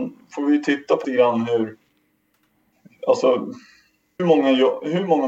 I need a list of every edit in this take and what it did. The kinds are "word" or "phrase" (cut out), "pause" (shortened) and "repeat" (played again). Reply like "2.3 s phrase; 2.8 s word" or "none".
1.0 s word; 4.2 s word

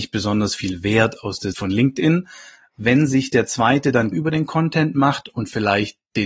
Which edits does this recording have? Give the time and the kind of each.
1.5 s word; 4.1 s word

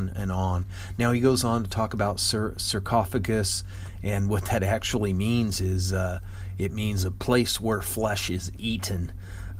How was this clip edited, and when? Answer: none

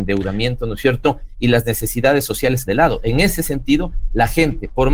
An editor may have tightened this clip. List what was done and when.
2.7 s word

